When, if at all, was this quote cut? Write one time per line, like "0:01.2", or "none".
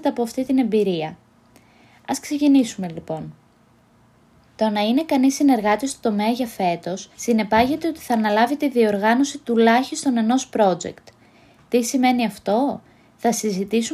0:07.1

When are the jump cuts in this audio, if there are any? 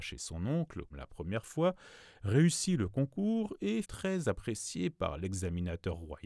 0:00.9
0:03.8

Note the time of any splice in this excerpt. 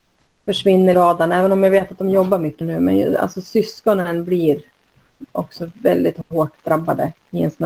0:00.9
0:02.6

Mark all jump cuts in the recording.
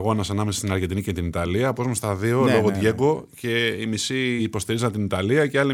0:01.8
0:04.4

